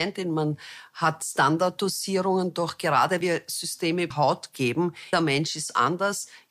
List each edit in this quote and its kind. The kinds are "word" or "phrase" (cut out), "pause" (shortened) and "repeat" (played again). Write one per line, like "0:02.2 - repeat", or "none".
0:03.2 - word
0:04.1 - word
0:05.1 - word